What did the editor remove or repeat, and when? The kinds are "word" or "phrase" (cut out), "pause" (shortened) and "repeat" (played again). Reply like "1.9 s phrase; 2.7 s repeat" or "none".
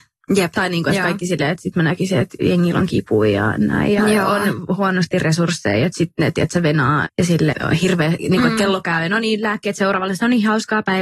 1.7 s word; 7.0 s word; 7.5 s word